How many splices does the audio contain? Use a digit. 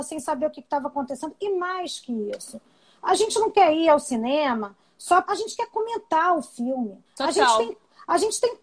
2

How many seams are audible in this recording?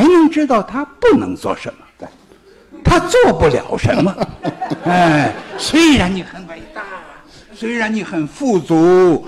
0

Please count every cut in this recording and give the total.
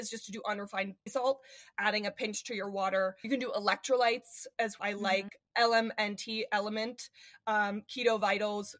3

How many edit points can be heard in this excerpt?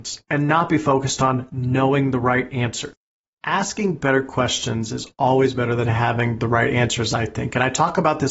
0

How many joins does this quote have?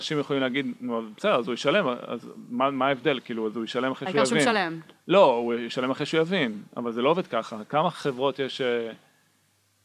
0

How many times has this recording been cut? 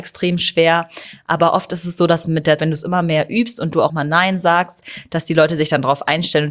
2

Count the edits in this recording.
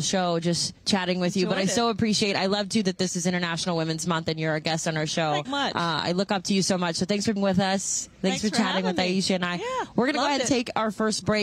2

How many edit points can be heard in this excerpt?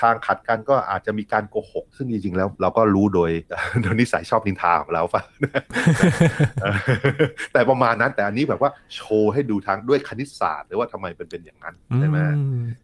1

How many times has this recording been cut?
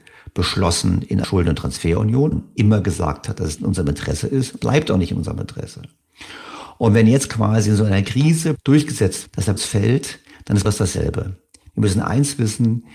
8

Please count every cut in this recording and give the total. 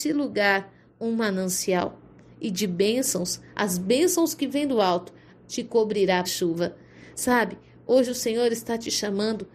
1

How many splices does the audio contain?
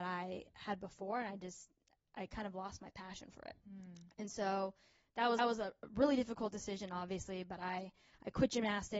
2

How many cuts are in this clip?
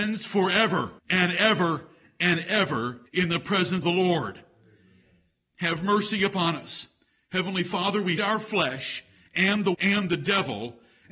5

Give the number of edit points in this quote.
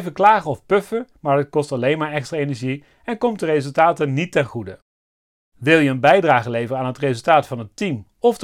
0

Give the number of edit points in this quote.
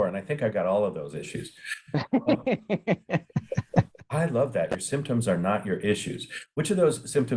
0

